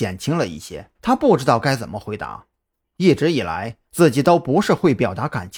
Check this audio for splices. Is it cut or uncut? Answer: cut